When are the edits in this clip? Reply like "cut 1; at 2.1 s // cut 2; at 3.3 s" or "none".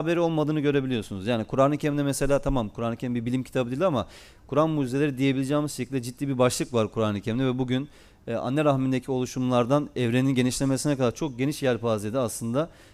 none